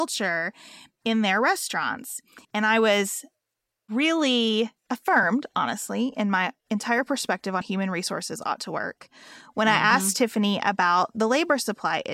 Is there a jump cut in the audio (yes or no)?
yes